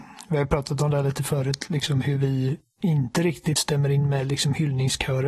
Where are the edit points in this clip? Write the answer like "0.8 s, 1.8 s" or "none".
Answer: 3.6 s